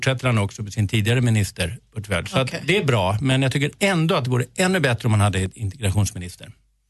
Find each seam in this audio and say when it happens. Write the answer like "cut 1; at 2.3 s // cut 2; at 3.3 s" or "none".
none